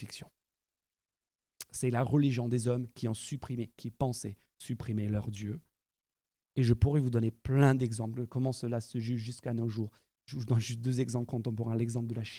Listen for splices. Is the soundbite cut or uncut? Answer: uncut